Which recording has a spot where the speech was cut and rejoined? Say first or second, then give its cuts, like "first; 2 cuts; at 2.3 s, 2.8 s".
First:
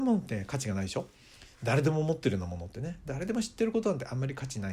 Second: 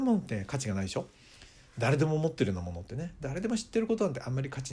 first; 1 cut; at 1.5 s